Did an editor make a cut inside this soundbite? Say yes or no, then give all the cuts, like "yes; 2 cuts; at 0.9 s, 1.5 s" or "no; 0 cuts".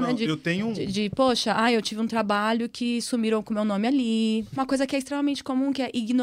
no; 0 cuts